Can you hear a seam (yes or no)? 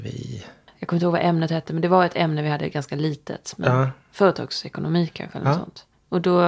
no